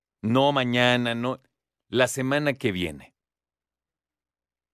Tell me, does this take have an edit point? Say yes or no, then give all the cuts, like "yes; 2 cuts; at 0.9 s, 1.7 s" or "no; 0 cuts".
no; 0 cuts